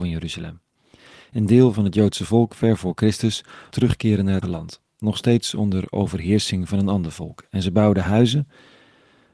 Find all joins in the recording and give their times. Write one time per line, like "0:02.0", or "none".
0:03.7
0:04.4